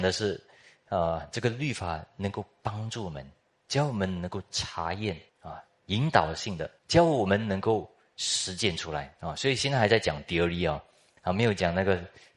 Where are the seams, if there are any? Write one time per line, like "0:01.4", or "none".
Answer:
0:05.3
0:06.8

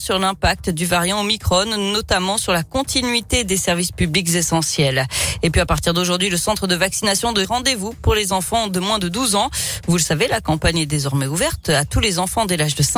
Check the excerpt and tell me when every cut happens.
0:07.4

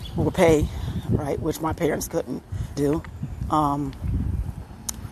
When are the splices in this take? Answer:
0:02.1
0:02.8

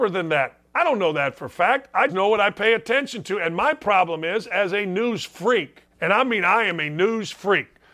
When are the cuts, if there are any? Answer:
0:02.1
0:05.9

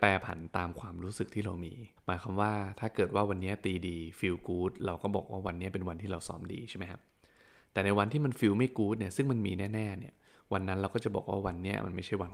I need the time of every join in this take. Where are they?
0:02.0

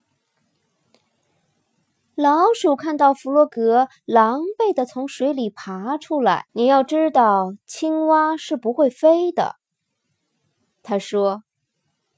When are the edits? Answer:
0:06.5

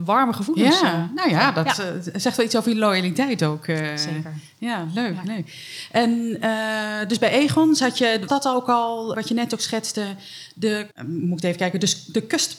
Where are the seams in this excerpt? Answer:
0:08.3
0:09.1
0:10.9

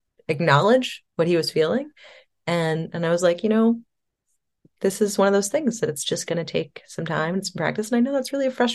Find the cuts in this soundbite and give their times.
0:01.1

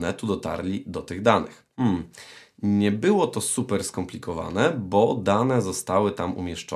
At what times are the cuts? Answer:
0:01.7

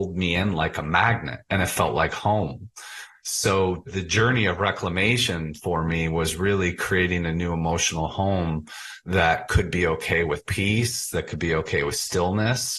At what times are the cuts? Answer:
none

